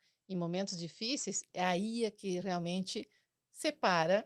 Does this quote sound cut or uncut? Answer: uncut